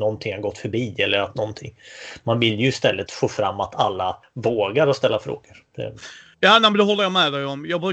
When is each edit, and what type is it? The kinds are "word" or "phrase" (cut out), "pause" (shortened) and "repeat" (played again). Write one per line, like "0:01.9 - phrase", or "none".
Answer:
0:01.3 - phrase
0:03.1 - word